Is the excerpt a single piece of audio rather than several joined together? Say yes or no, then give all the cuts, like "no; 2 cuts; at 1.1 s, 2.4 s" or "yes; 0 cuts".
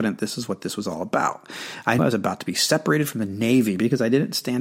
no; 1 cut; at 2.0 s